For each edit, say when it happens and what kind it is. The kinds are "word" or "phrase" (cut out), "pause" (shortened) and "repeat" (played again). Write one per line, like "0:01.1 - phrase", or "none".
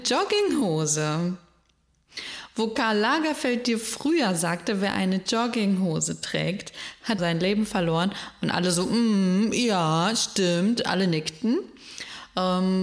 0:07.2 - phrase